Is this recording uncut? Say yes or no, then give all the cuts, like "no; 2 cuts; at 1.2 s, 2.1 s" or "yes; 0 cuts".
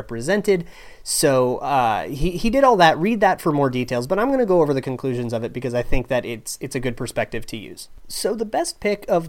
yes; 0 cuts